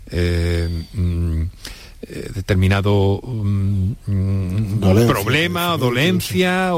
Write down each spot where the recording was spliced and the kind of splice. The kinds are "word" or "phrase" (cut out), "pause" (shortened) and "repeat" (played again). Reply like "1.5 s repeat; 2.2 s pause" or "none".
none